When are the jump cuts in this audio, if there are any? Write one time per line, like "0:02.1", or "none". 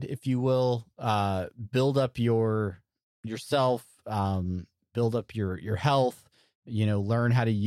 none